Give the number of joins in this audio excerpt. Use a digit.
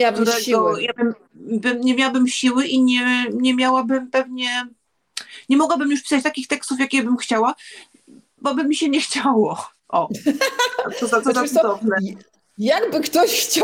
0